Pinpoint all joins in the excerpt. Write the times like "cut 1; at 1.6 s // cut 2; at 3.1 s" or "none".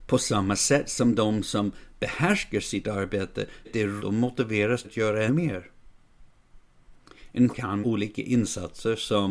cut 1; at 3.6 s // cut 2; at 4.0 s // cut 3; at 4.8 s // cut 4; at 5.3 s // cut 5; at 7.5 s // cut 6; at 7.8 s